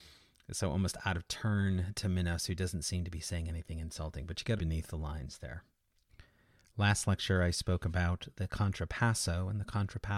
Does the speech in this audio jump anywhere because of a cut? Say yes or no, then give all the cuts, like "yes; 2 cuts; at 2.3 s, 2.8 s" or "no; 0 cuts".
yes; 1 cut; at 4.6 s